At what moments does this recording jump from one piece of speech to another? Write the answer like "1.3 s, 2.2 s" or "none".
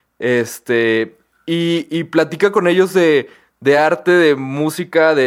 none